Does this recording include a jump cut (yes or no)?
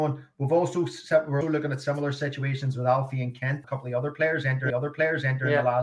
yes